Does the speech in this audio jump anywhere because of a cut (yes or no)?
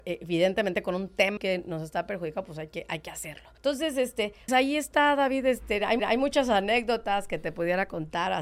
yes